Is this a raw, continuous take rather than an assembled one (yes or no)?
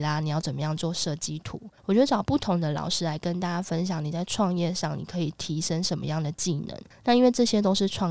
no